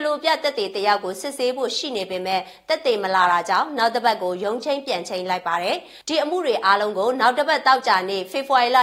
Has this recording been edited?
yes; 1 cut; at 6.0 s

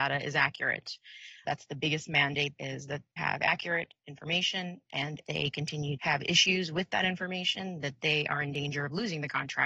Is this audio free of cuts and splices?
no; 5 cuts; at 1.4 s, 2.6 s, 3.2 s, 5.2 s, 6.0 s

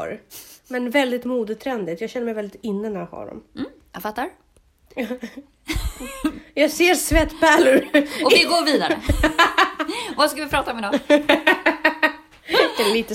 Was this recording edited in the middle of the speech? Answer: no; 0 cuts

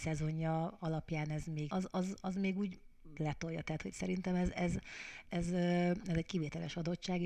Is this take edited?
yes; 3 cuts; at 1.7 s, 3.2 s, 5.2 s

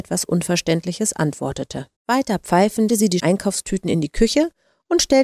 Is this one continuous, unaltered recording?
no; 3 cuts; at 1.9 s, 2.9 s, 3.2 s

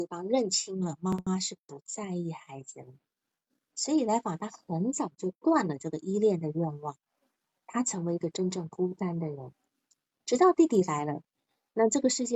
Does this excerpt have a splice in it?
no; 0 cuts

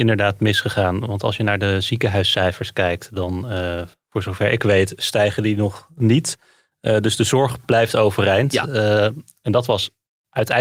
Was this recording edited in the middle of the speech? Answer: no; 0 cuts

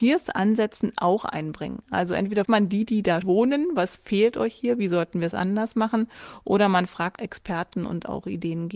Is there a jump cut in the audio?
yes; 3 cuts; at 2.4 s, 3.2 s, 7.2 s

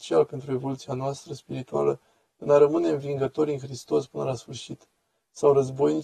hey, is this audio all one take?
yes; 0 cuts

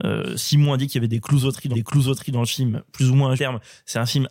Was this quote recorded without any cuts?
no; 2 cuts; at 1.7 s, 3.4 s

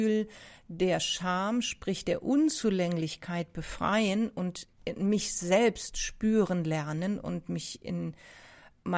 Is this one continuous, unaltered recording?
yes; 0 cuts

